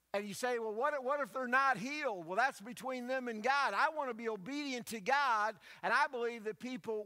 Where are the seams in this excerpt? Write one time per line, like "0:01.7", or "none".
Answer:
none